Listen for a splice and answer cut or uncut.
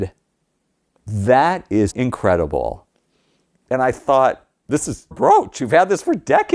cut